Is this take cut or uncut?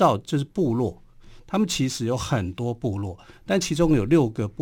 uncut